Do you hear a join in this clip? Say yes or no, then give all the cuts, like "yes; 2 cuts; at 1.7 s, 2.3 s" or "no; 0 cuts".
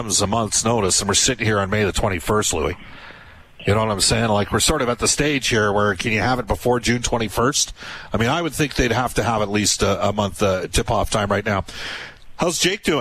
no; 0 cuts